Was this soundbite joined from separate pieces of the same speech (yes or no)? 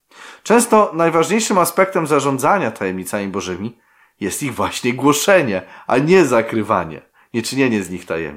no